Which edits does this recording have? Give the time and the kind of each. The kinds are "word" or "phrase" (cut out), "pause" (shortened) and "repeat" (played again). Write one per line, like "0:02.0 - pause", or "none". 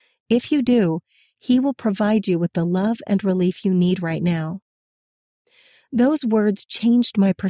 none